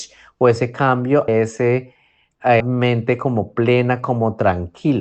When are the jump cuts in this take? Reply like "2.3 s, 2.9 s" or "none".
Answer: 1.3 s, 2.6 s